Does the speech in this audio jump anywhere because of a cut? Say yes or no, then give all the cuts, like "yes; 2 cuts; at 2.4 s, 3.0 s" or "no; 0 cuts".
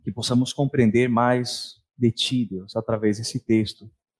no; 0 cuts